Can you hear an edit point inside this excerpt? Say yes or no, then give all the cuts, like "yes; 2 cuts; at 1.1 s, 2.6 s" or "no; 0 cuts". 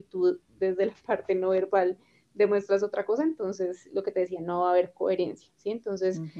no; 0 cuts